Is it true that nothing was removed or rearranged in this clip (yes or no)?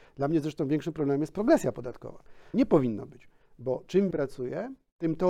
no